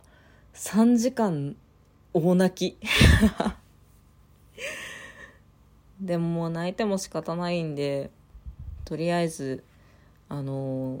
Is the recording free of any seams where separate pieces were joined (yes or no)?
yes